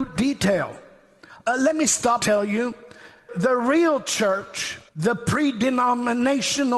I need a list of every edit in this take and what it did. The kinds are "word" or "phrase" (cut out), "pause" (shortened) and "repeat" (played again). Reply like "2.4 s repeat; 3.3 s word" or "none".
2.2 s word; 3.3 s word; 4.9 s pause